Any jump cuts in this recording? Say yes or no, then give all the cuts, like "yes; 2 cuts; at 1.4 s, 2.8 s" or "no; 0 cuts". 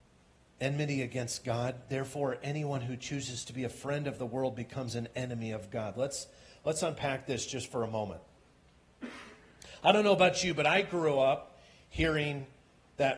no; 0 cuts